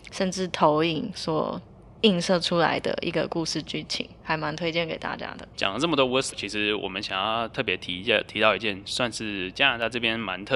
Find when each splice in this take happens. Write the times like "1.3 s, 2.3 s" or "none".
5.5 s, 6.3 s